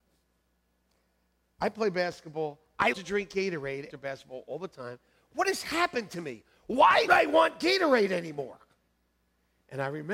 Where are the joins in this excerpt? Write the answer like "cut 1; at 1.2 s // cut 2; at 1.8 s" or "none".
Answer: cut 1; at 2.9 s // cut 2; at 3.9 s // cut 3; at 7.1 s